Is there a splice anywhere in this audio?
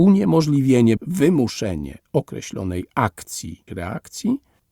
yes; 2 cuts; at 1.0 s, 3.7 s

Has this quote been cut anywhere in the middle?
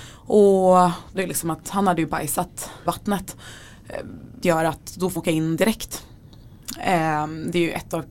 yes; 4 cuts; at 1.2 s, 2.9 s, 4.4 s, 5.2 s

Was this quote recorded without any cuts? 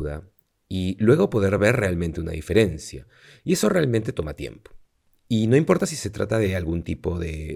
yes; 0 cuts

